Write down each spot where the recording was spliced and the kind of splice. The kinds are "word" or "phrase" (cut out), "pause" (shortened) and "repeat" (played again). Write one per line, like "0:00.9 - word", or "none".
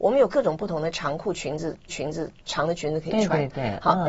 0:01.9 - repeat